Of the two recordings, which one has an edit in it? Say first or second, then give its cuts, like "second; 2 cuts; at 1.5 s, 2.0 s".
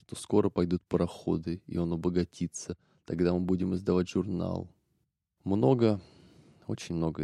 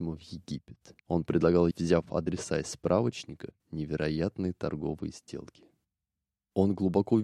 second; 3 cuts; at 1.0 s, 1.7 s, 3.6 s